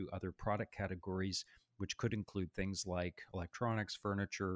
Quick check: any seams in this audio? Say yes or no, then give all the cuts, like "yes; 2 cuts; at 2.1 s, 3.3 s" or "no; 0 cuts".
no; 0 cuts